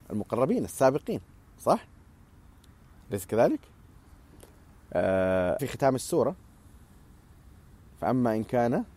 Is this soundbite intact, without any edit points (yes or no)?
no